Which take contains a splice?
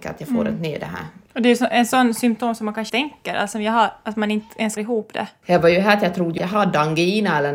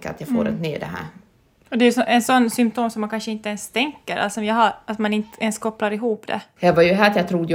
first; 4 cuts; at 1.3 s, 2.9 s, 4.8 s, 6.4 s

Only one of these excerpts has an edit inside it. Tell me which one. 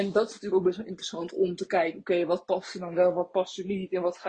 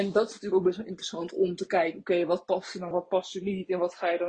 second; 1 cut; at 2.9 s

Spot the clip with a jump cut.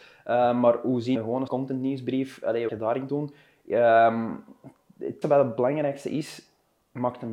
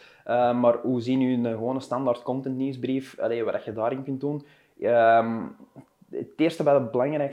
first; 5 cuts; at 1.2 s, 1.5 s, 2.7 s, 3.1 s, 5.2 s

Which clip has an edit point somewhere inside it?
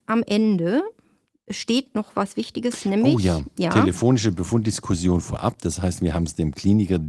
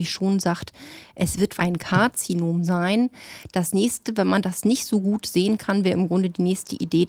second; 1 cut; at 1.6 s

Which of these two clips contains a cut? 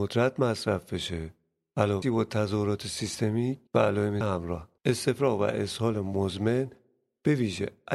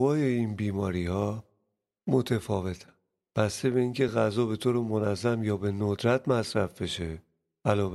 first; 4 cuts; at 2.0 s, 3.7 s, 4.2 s, 4.8 s

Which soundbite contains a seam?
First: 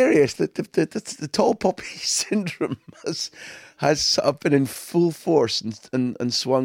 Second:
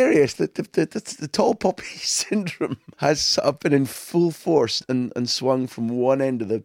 second; 2 cuts; at 2.9 s, 4.8 s

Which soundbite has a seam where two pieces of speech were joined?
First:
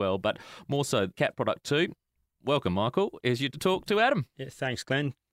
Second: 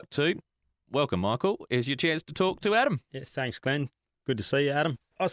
first; 2 cuts; at 1.1 s, 3.5 s

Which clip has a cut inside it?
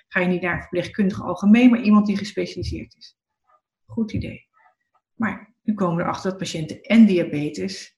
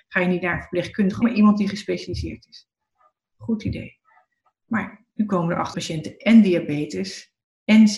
second; 2 cuts; at 1.2 s, 5.7 s

